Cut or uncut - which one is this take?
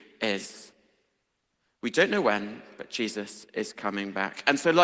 uncut